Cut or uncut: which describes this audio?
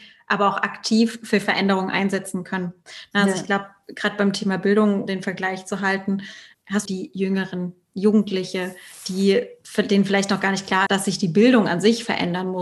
cut